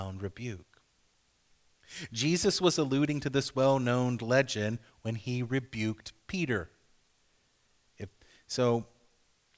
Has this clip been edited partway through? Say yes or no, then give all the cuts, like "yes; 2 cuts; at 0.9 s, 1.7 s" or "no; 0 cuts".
no; 0 cuts